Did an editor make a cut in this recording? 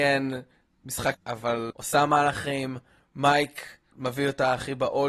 yes; 2 cuts; at 1.1 s, 1.7 s

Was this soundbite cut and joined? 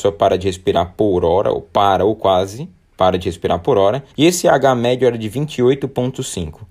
yes; 1 cut; at 4.1 s

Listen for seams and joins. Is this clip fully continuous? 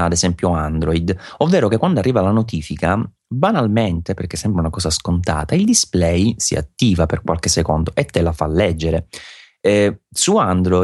yes; 0 cuts

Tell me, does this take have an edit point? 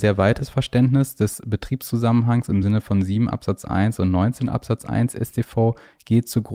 no; 0 cuts

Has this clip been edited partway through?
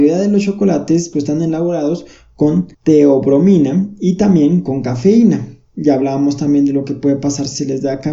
yes; 2 cuts; at 1.1 s, 2.7 s

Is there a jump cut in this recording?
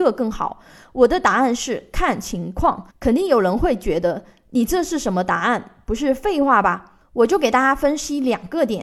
yes; 1 cut; at 2.9 s

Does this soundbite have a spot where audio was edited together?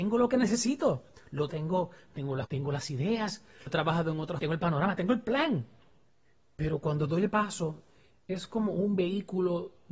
yes; 5 cuts; at 1.5 s, 2.4 s, 3.7 s, 4.4 s, 7.3 s

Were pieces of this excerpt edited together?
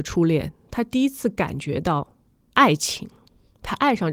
no; 0 cuts

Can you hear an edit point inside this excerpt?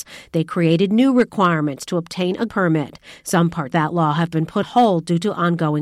yes; 3 cuts; at 2.5 s, 3.7 s, 4.6 s

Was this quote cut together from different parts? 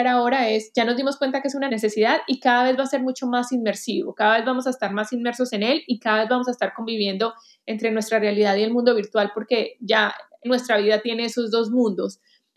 no; 0 cuts

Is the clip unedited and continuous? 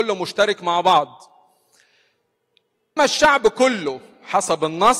no; 1 cut; at 3.0 s

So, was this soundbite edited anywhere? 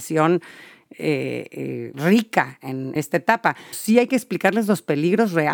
yes; 3 cuts; at 1.9 s, 3.0 s, 3.7 s

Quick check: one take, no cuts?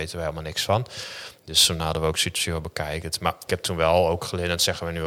no; 1 cut; at 3.5 s

